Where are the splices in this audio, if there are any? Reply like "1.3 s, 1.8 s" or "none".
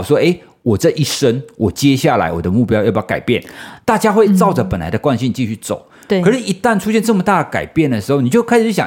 none